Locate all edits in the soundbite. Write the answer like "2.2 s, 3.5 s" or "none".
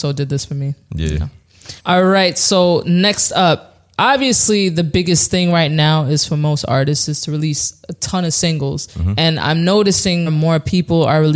1.8 s, 8.9 s, 10.3 s